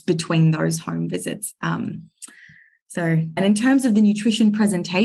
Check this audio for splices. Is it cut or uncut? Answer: cut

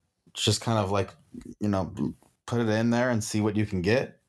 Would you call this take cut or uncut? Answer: uncut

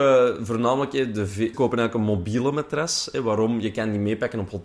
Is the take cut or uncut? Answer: cut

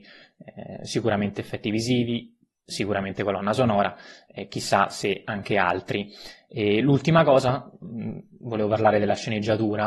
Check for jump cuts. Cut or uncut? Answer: uncut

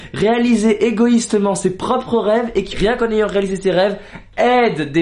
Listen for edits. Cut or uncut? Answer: cut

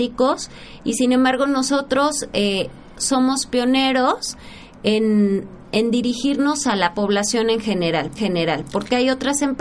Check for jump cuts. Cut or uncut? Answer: cut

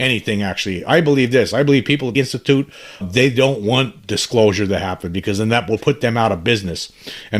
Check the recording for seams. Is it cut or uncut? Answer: cut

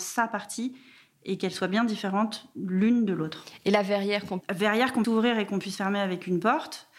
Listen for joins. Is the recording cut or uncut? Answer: cut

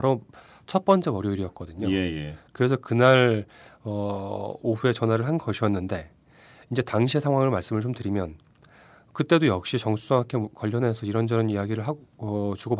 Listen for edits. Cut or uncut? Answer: uncut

